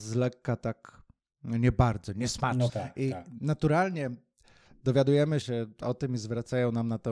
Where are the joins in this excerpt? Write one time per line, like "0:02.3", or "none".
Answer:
0:02.7
0:05.4